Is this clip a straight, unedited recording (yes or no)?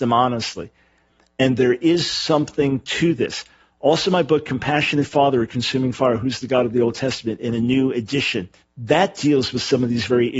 no